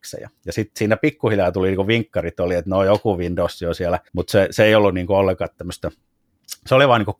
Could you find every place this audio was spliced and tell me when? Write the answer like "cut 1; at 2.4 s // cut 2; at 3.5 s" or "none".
cut 1; at 4.1 s